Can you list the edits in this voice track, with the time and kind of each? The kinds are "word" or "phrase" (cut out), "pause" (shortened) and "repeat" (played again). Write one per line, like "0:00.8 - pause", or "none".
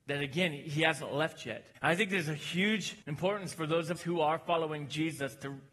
0:01.7 - pause
0:03.0 - pause
0:04.0 - word